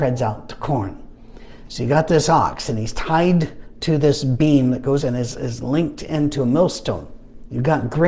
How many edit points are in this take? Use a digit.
1